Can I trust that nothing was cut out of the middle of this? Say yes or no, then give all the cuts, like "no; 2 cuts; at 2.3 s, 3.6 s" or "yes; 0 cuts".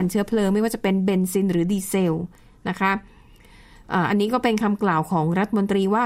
yes; 0 cuts